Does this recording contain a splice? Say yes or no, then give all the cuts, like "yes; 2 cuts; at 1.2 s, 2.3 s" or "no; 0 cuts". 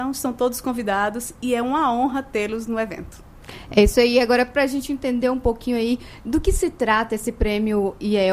no; 0 cuts